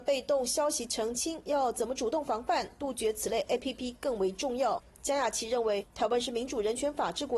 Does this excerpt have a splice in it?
no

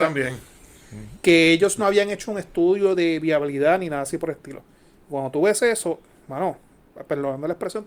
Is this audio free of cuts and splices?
yes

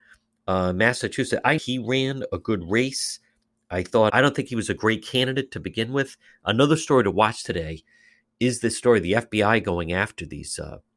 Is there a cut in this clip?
yes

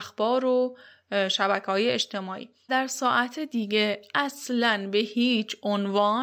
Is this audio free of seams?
no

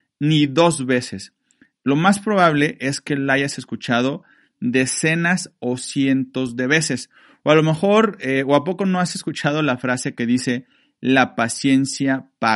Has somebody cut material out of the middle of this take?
no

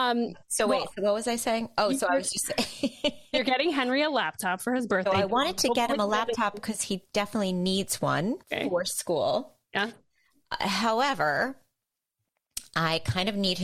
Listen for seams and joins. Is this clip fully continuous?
no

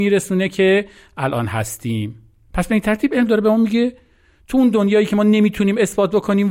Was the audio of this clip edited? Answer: no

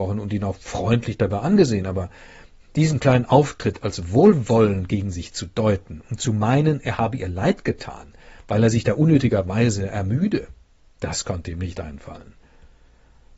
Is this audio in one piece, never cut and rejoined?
yes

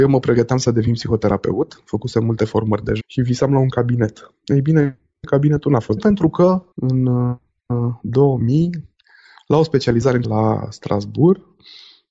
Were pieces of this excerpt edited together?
yes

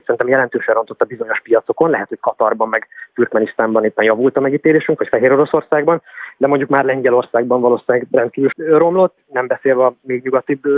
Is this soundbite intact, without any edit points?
no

